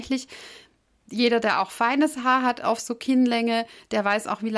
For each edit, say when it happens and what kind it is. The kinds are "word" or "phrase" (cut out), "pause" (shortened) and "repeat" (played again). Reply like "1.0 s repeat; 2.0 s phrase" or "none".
none